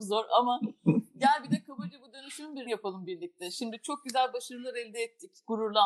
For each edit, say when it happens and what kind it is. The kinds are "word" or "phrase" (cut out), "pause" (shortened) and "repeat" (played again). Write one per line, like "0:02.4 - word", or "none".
0:02.7 - word